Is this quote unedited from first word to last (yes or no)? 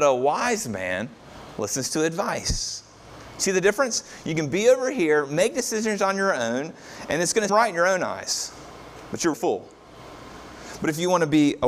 no